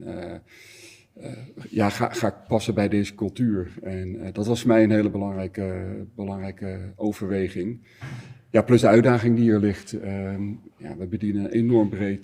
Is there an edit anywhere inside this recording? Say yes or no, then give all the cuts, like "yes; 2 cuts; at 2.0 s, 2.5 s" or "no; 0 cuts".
no; 0 cuts